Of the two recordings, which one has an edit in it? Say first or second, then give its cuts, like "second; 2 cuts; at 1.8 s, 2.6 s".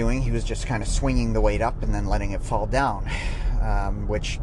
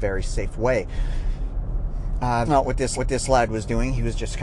second; 2 cuts; at 2.5 s, 3.0 s